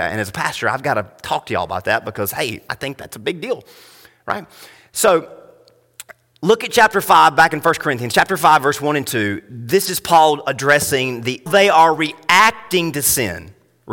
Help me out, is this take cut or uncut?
cut